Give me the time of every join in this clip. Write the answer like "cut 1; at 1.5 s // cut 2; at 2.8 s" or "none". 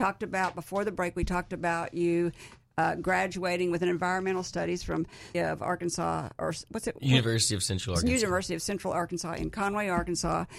cut 1; at 5.3 s